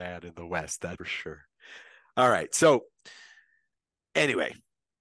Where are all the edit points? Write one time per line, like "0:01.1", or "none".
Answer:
0:01.0